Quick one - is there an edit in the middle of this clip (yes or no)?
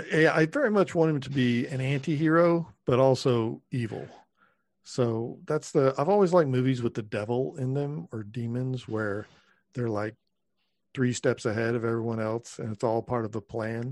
no